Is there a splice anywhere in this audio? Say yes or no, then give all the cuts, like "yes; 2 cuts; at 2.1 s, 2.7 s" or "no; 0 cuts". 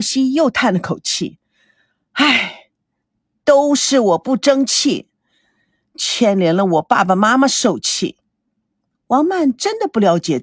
no; 0 cuts